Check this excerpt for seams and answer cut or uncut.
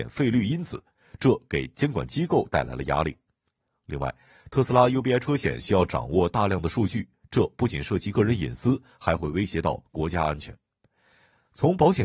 uncut